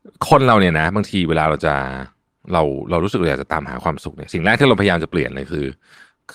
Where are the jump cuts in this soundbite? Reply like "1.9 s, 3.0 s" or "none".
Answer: none